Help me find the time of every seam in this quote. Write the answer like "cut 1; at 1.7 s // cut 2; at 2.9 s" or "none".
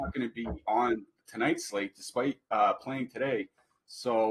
cut 1; at 1.2 s